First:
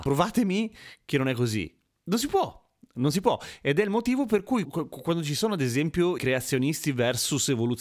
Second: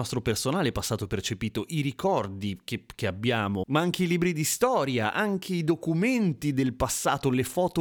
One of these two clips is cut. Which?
first; 2 cuts; at 4.6 s, 6.2 s

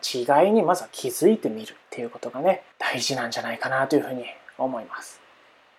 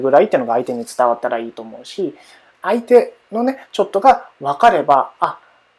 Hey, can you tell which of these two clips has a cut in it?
first; 2 cuts; at 1.8 s, 2.7 s

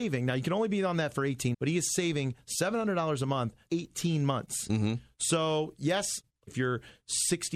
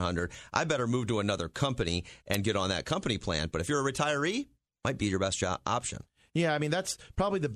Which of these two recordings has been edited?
first; 3 cuts; at 1.5 s, 3.7 s, 6.5 s

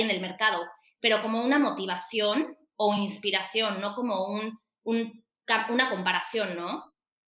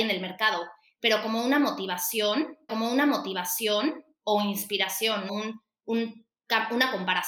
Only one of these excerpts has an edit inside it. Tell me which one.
second; 2 cuts; at 2.7 s, 5.3 s

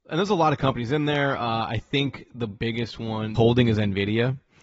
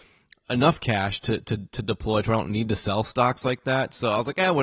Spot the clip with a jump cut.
first; 1 cut; at 3.4 s

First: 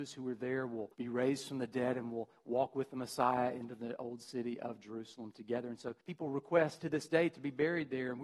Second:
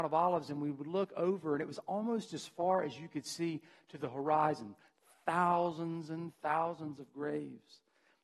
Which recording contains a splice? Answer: first; 3 cuts; at 0.9 s, 6.0 s, 6.8 s

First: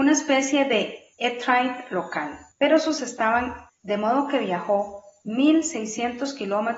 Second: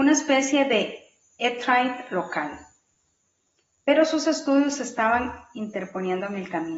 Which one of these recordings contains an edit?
first; 4 cuts; at 1.1 s, 2.5 s, 3.0 s, 3.7 s

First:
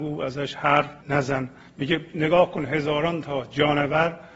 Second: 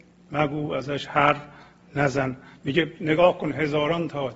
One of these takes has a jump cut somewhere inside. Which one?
first; 1 cut; at 1.0 s

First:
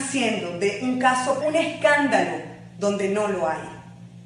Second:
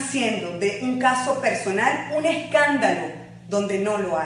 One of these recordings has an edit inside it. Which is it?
first; 1 cut; at 1.4 s

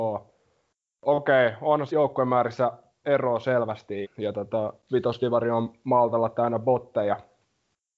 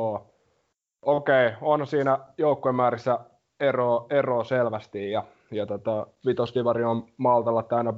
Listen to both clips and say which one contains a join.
first; 3 cuts; at 1.9 s, 3.0 s, 4.0 s

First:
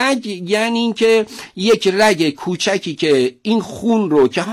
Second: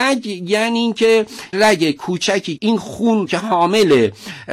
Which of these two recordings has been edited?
second; 3 cuts; at 1.5 s, 2.6 s, 3.3 s

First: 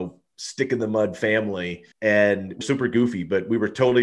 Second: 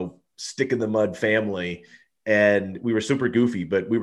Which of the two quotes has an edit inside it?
first; 2 cuts; at 1.9 s, 2.6 s

